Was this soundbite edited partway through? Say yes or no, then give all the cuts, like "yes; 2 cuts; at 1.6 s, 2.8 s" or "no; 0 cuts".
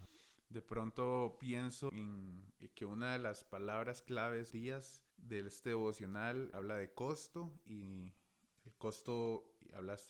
yes; 4 cuts; at 1.9 s, 4.5 s, 5.1 s, 6.5 s